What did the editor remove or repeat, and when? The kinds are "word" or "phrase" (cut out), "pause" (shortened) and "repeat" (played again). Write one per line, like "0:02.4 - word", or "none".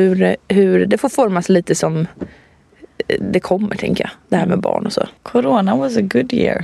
0:05.2 - pause